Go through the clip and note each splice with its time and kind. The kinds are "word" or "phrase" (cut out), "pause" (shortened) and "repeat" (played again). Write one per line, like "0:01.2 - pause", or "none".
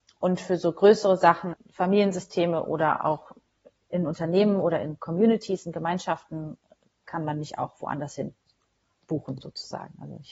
0:01.5 - word